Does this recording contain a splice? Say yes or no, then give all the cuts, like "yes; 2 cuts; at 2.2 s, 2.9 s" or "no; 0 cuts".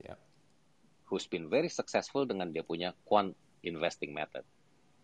no; 0 cuts